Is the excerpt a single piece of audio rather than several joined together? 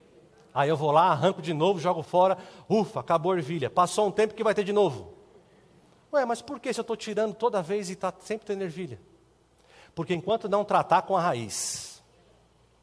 yes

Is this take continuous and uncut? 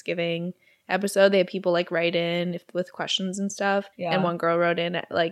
no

